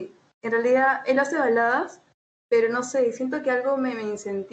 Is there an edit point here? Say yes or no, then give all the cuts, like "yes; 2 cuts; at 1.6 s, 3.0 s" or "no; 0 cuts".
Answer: no; 0 cuts